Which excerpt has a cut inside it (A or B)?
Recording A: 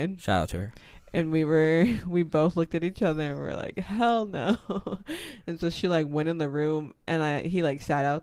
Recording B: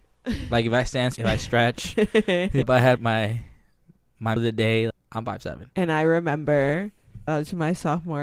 B